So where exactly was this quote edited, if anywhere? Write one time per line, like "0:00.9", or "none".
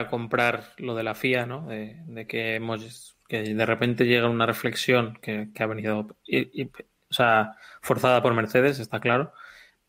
none